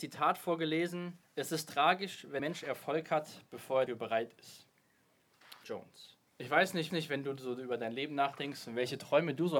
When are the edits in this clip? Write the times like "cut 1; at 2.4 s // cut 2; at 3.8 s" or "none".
cut 1; at 1.2 s // cut 2; at 2.4 s // cut 3; at 3.9 s // cut 4; at 5.6 s // cut 5; at 6.3 s // cut 6; at 6.9 s